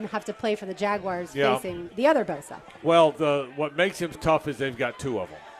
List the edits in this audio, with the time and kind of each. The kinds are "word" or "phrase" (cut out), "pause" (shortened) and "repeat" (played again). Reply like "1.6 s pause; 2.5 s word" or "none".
3.1 s word; 4.1 s word